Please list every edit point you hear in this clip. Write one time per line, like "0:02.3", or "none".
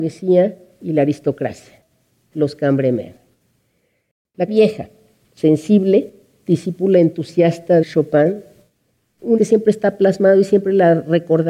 0:04.5
0:07.8
0:09.4

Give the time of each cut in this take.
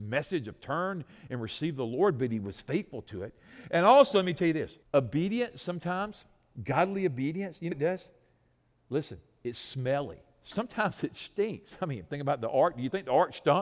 0:04.8
0:07.7

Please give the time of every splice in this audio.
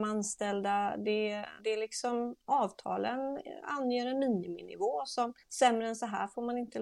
0:01.6
0:05.4

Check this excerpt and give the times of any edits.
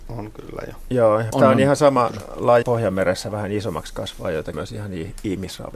0:01.3
0:02.6
0:04.5

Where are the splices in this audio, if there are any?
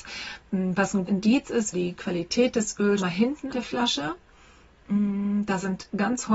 0:01.1
0:01.7
0:03.0
0:03.5

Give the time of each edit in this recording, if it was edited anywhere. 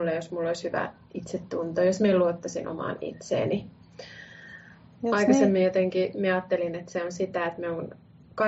0:04.9

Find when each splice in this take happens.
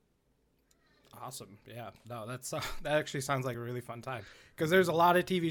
none

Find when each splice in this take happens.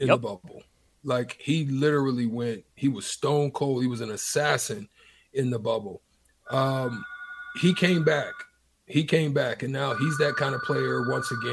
none

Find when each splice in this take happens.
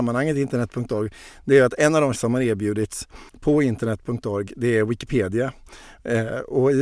0:02.2
0:03.3

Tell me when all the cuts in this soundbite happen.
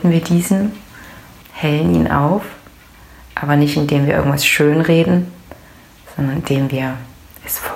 0:01.4

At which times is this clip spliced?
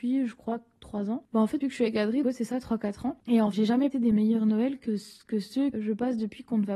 0:01.6
0:02.2
0:03.5
0:03.9
0:05.7

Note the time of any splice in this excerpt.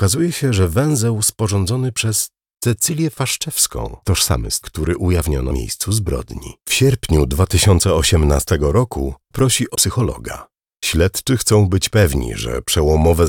0:04.0
0:04.6
0:05.5
0:06.6
0:09.3
0:09.7

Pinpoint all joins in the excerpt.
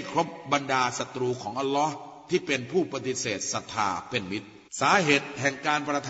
0:04.7

